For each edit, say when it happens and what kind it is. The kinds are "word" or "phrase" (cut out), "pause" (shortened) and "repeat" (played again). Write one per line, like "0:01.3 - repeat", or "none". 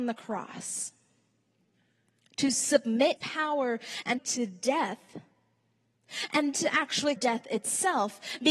0:03.2 - word
0:04.2 - word
0:06.5 - word
0:07.2 - word